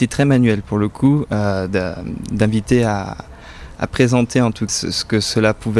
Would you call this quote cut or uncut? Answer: cut